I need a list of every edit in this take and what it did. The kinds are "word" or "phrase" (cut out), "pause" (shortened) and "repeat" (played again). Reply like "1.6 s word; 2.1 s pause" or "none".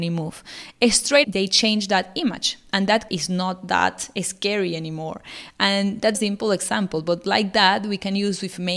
1.2 s word; 3.1 s word; 6.1 s phrase